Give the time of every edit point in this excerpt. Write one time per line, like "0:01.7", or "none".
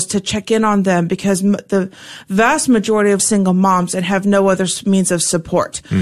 0:03.2